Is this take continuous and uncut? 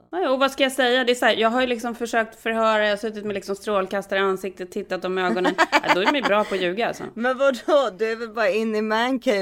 yes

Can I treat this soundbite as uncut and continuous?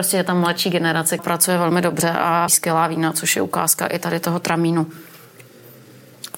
no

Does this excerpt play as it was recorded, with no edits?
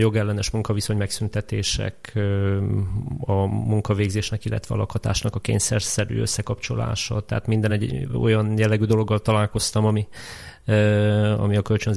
yes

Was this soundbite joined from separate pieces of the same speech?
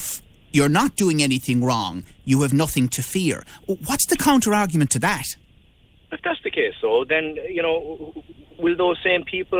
no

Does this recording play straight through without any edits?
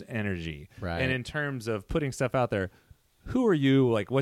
yes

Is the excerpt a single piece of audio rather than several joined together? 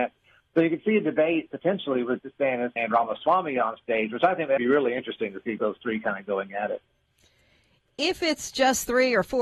no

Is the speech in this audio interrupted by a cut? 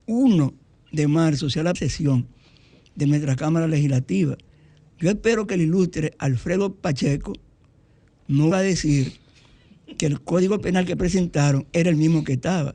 yes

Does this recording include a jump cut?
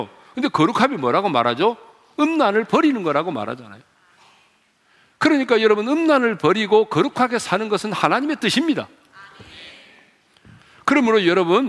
no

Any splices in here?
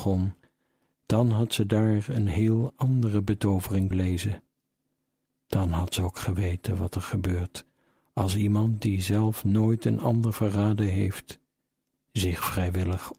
yes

